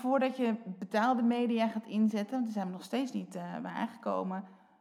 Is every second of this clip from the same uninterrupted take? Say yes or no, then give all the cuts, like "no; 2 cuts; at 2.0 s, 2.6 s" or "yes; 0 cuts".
yes; 0 cuts